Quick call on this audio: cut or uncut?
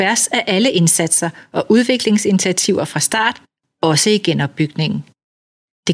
uncut